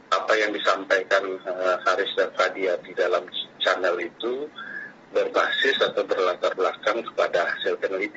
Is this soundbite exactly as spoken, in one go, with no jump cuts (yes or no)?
yes